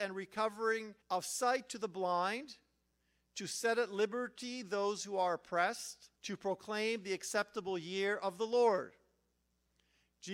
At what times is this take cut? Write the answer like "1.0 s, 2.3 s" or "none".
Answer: 1.0 s, 6.2 s